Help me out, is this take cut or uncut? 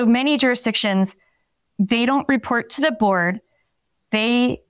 uncut